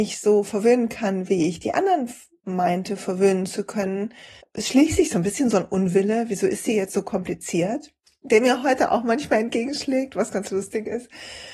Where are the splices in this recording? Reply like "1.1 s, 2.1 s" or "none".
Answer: 4.4 s